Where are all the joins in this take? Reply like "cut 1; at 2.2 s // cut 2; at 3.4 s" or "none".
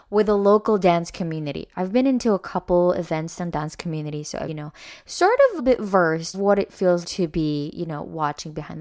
cut 1; at 4.5 s // cut 2; at 5.6 s // cut 3; at 6.3 s // cut 4; at 7.0 s

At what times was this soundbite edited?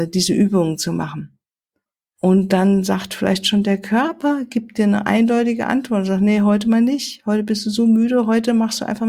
cut 1; at 1.9 s

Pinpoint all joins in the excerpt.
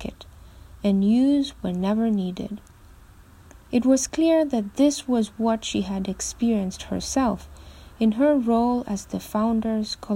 none

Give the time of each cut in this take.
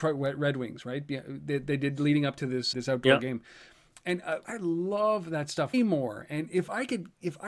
cut 1; at 2.7 s // cut 2; at 4.4 s // cut 3; at 5.7 s

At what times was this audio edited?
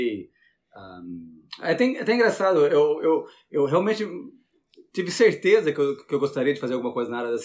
none

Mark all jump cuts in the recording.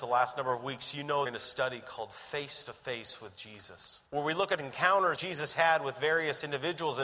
cut 1; at 1.3 s // cut 2; at 4.1 s // cut 3; at 4.6 s // cut 4; at 5.2 s

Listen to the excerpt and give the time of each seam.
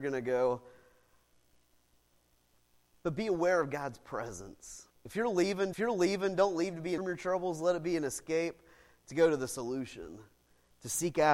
cut 1; at 4.9 s // cut 2; at 5.7 s // cut 3; at 7.0 s

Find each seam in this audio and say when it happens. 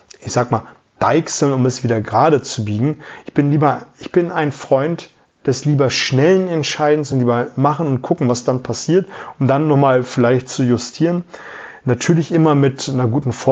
none

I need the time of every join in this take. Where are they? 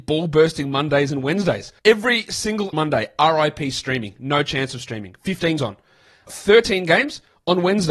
cut 1; at 1.8 s // cut 2; at 2.7 s // cut 3; at 5.6 s // cut 4; at 6.3 s

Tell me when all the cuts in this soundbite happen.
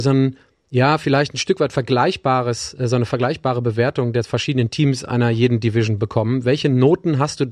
none

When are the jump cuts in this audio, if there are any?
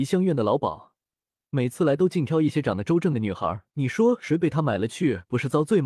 cut 1; at 3.7 s

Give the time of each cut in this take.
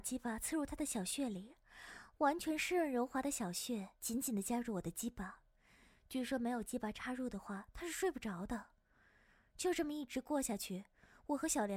cut 1; at 4.0 s

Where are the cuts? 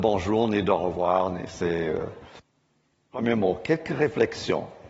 none

